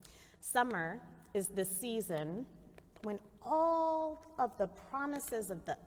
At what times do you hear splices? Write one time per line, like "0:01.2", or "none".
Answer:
none